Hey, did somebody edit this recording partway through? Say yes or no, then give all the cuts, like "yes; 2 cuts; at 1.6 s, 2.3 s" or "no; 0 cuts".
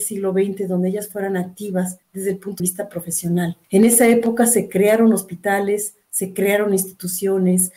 yes; 2 cuts; at 2.0 s, 2.6 s